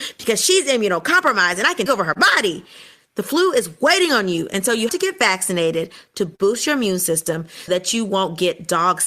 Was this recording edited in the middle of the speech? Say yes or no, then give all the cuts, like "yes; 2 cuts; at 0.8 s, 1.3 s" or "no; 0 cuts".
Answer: yes; 3 cuts; at 1.9 s, 4.9 s, 7.7 s